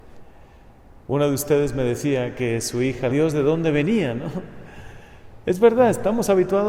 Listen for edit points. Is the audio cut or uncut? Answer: cut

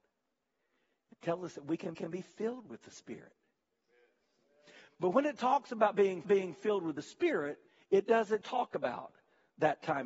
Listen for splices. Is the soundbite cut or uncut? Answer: cut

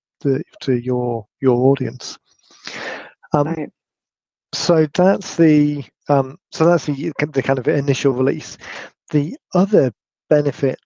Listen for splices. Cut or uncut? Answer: uncut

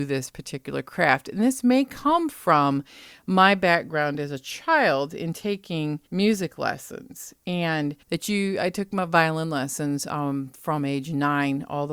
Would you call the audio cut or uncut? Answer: cut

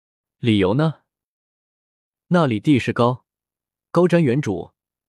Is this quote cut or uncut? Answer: uncut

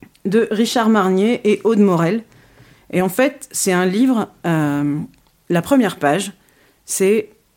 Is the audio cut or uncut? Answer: uncut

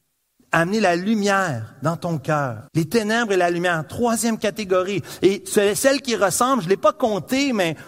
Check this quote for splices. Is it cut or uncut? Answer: cut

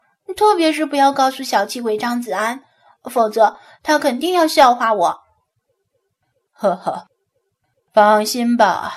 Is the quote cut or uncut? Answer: uncut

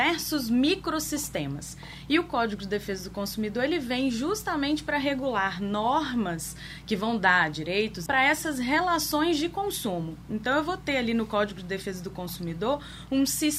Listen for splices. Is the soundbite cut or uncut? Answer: cut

